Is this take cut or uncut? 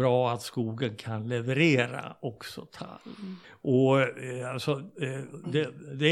cut